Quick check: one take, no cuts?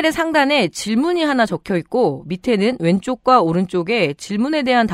yes; 0 cuts

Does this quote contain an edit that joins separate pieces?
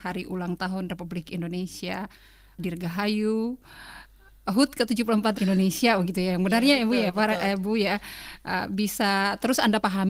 yes; 2 cuts; at 2.6 s, 5.4 s

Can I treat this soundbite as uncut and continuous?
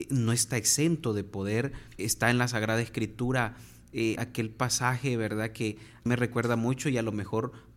no; 3 cuts; at 2.0 s, 4.2 s, 6.1 s

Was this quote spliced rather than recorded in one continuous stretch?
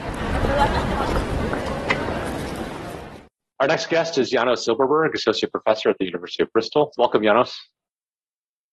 no; 0 cuts

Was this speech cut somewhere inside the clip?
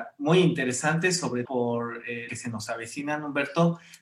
yes; 2 cuts; at 1.5 s, 2.3 s

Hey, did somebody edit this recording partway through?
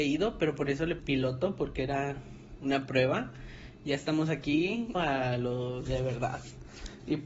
yes; 2 cuts; at 1.0 s, 4.9 s

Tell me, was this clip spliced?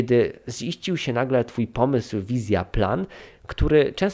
no; 0 cuts

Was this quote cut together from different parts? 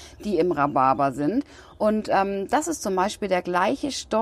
no; 0 cuts

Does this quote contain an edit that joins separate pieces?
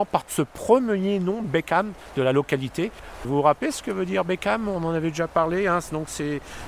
no; 0 cuts

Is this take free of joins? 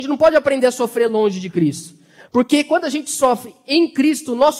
yes; 0 cuts

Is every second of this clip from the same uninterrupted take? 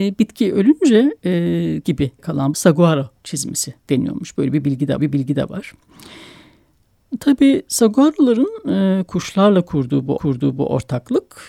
no; 5 cuts; at 1.8 s, 2.2 s, 2.5 s, 5.0 s, 10.2 s

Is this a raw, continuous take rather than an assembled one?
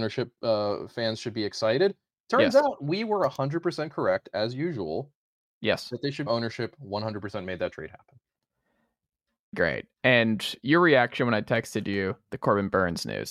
no; 2 cuts; at 6.3 s, 9.5 s

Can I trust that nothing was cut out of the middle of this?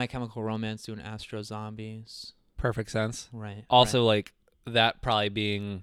yes; 0 cuts

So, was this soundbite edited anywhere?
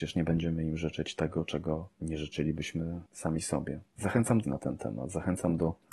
yes; 2 cuts; at 3.1 s, 4.4 s

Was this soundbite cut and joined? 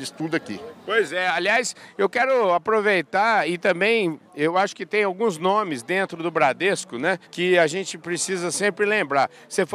yes; 1 cut; at 7.2 s

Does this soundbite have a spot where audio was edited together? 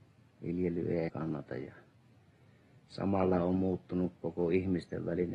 yes; 1 cut; at 1.1 s

